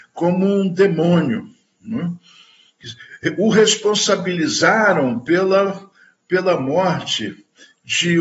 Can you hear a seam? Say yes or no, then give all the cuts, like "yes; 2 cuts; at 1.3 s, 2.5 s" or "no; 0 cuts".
no; 0 cuts